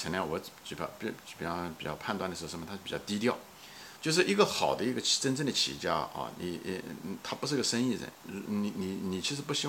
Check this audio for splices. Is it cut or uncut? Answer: cut